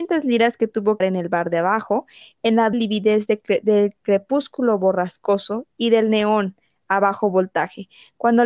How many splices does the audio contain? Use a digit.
2